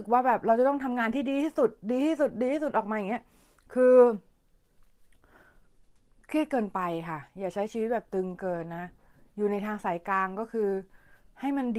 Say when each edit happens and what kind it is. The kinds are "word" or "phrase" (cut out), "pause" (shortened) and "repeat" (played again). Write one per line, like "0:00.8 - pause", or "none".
none